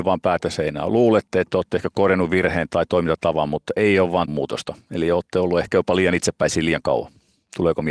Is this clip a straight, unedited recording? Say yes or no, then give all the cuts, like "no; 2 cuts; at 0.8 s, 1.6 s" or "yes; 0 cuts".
no; 1 cut; at 4.3 s